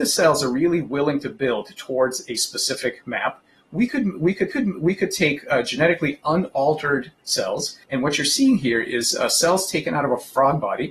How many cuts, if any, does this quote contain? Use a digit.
2